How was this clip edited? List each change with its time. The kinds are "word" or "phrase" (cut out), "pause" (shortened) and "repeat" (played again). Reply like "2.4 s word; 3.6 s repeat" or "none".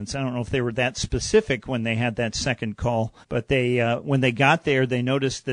3.2 s pause